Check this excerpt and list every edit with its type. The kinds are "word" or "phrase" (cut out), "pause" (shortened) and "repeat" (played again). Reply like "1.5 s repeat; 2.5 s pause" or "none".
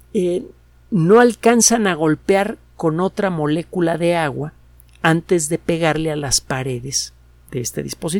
none